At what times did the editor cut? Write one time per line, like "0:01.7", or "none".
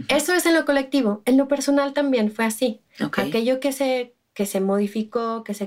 none